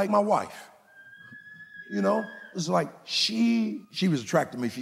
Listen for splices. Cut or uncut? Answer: cut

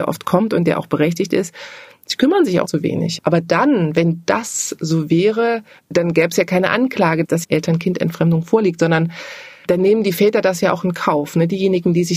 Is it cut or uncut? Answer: cut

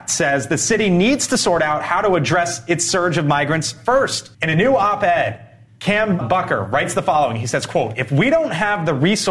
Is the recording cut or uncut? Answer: cut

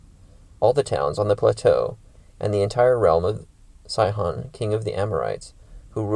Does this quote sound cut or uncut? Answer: uncut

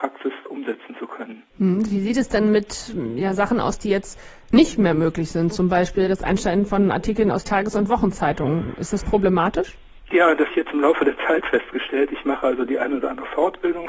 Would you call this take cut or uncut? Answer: cut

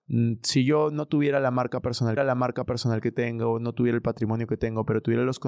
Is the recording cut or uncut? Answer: cut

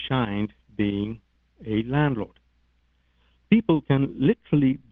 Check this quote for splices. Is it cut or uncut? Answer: uncut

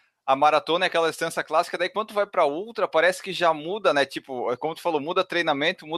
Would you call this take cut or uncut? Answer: uncut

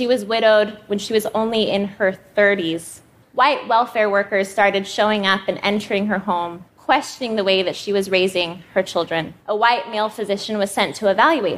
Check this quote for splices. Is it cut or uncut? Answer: cut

